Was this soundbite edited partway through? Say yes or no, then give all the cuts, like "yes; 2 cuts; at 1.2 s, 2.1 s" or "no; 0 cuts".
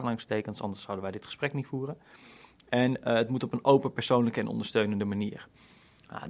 no; 0 cuts